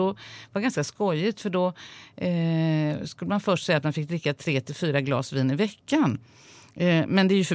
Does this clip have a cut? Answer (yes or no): no